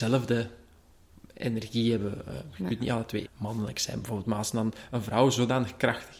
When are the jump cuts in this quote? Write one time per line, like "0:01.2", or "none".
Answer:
0:03.2

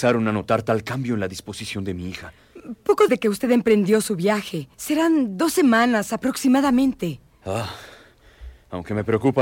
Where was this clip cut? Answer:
0:03.1
0:04.7

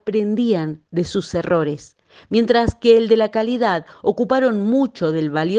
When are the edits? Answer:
none

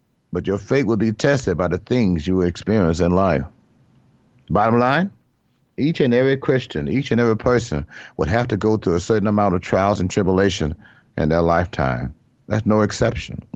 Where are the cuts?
none

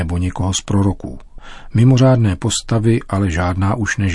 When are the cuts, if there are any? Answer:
none

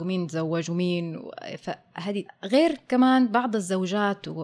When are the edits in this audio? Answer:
0:02.3

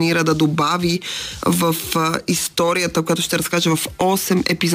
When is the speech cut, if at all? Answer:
none

